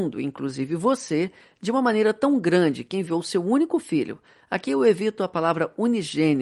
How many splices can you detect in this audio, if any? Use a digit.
0